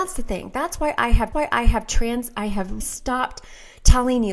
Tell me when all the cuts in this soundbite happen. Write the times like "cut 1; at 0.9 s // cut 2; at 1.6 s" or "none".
cut 1; at 1.3 s // cut 2; at 2.8 s